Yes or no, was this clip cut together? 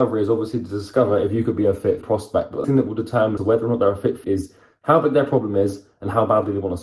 yes